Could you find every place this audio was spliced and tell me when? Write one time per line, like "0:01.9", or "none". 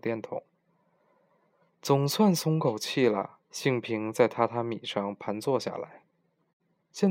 0:03.4